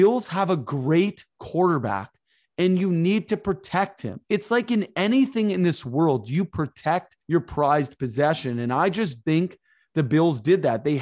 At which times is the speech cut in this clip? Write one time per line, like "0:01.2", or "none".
0:04.2
0:07.2
0:09.2